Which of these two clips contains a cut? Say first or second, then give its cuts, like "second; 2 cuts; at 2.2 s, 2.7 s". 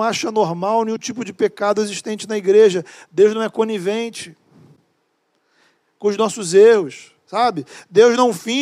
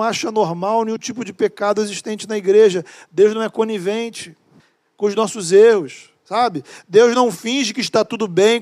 second; 1 cut; at 4.6 s